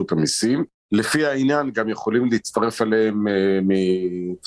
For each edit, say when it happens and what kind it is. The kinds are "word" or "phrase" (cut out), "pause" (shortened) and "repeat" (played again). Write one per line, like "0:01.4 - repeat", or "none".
none